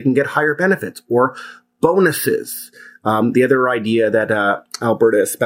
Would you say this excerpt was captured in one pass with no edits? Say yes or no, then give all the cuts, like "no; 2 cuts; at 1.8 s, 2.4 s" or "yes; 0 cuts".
yes; 0 cuts